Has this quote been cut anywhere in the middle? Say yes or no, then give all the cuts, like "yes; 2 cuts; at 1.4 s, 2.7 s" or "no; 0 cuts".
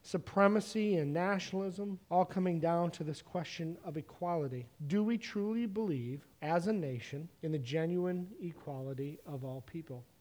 yes; 4 cuts; at 2.0 s, 4.7 s, 6.3 s, 7.3 s